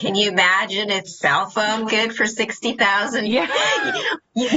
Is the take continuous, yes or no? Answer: no